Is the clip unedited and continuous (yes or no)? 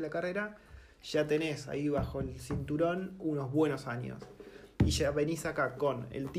yes